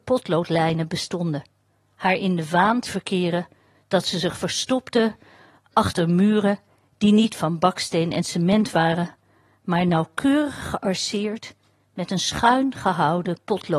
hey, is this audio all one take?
no; 1 cut; at 2.9 s

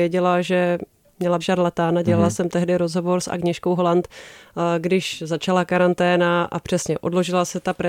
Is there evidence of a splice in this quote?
yes; 1 cut; at 1.4 s

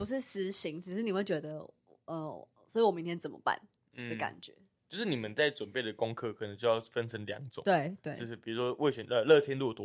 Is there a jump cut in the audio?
no; 0 cuts

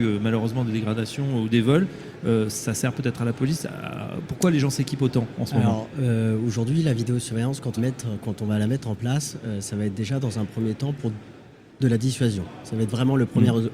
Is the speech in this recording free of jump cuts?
no; 1 cut; at 7.8 s

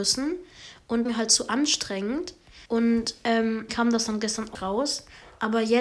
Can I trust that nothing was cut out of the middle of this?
no; 4 cuts; at 1.0 s, 2.7 s, 3.7 s, 4.5 s

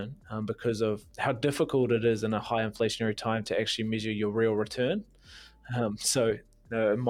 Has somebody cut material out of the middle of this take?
no; 0 cuts

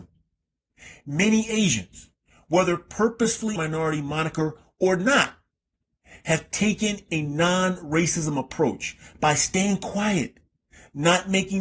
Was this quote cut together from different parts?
yes; 1 cut; at 3.6 s

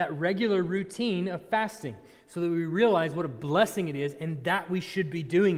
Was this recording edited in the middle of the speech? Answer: no; 0 cuts

